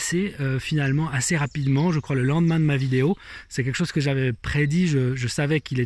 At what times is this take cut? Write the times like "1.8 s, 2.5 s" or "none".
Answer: none